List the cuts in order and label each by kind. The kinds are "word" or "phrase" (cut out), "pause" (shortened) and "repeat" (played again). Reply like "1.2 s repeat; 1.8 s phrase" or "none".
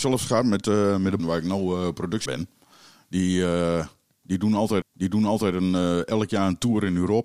1.2 s phrase; 2.3 s phrase; 4.8 s repeat